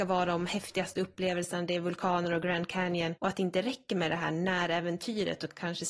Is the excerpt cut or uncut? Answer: cut